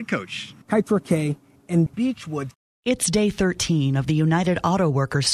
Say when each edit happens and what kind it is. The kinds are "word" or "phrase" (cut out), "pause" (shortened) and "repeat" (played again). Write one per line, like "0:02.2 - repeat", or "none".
none